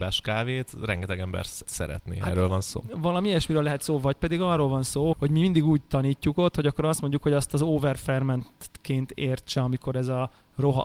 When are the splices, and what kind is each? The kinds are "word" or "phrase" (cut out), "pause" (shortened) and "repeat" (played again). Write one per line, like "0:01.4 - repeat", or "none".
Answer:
0:01.7 - word
0:05.1 - word